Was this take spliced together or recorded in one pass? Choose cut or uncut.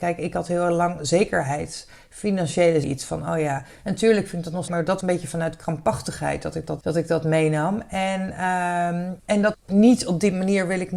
cut